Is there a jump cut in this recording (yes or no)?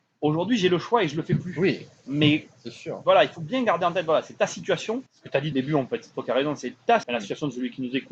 yes